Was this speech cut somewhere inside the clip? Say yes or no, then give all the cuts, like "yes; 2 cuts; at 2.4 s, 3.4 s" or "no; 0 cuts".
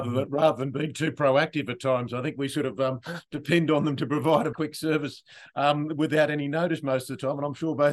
yes; 1 cut; at 4.5 s